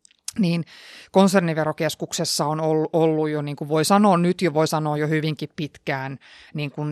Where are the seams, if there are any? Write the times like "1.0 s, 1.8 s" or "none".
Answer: none

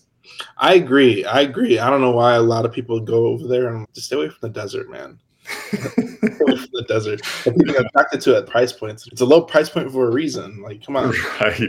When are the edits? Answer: 3.8 s, 7.7 s, 8.5 s, 9.1 s

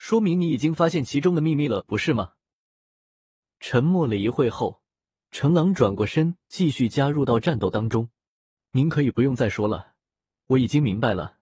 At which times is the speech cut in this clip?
none

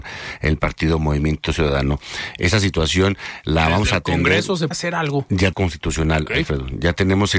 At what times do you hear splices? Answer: 4.7 s, 5.5 s

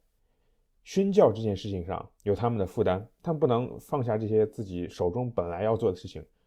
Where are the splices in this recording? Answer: 2.2 s

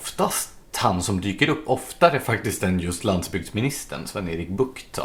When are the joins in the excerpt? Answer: none

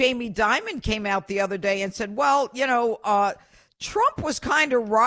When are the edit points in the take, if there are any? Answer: none

